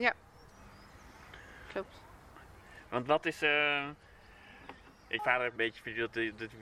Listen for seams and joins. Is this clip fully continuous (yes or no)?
no